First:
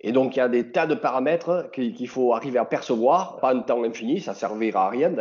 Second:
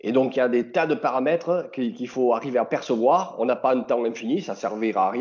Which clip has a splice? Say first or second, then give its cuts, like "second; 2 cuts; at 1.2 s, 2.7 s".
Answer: first; 1 cut; at 3.4 s